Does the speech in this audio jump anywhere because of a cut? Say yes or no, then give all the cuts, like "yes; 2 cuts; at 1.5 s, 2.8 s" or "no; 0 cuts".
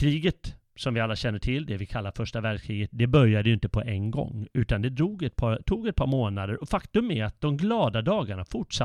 no; 0 cuts